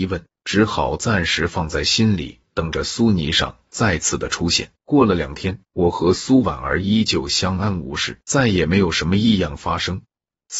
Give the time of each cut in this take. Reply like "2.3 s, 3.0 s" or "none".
4.8 s, 5.7 s, 8.2 s